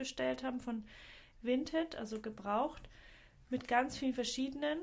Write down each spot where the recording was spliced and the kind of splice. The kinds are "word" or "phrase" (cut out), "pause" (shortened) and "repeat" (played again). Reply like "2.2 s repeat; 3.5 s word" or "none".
none